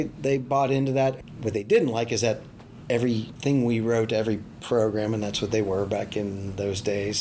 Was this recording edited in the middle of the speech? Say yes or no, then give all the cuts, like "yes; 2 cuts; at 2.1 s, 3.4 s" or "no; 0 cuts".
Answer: no; 0 cuts